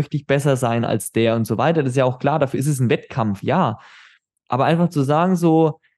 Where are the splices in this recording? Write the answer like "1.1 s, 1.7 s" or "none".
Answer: none

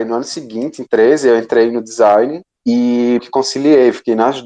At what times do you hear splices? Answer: 3.2 s

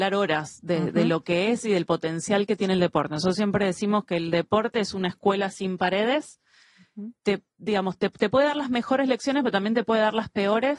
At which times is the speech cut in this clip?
7.2 s

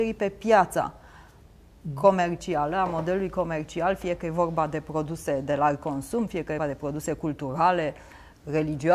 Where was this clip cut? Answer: 6.6 s

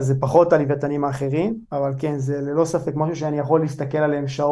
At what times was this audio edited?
1.6 s

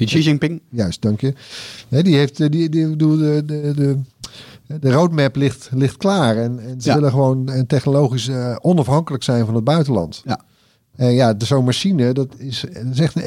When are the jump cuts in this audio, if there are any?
none

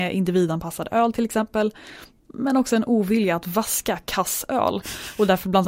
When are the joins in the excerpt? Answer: none

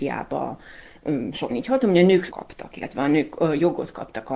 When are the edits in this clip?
1.5 s, 2.3 s

